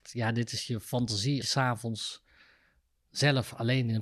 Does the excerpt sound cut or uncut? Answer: cut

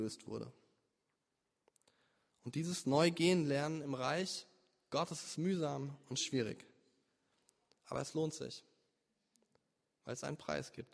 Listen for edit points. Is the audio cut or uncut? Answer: uncut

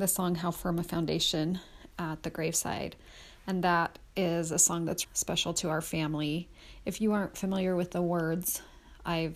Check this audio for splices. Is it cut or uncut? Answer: cut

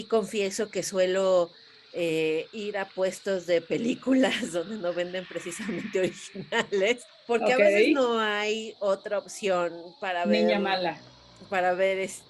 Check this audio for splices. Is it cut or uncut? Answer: uncut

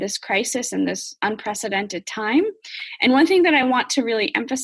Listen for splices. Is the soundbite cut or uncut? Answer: uncut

